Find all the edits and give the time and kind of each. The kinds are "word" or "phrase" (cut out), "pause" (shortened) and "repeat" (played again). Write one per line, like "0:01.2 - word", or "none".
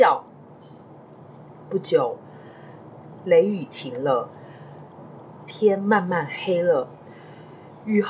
none